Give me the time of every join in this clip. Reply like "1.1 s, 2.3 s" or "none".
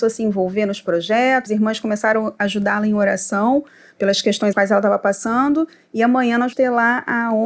1.5 s, 4.5 s, 6.5 s